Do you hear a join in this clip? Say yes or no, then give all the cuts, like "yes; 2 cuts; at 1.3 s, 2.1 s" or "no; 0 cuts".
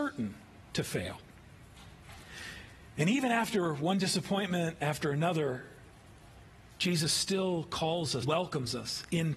yes; 1 cut; at 8.2 s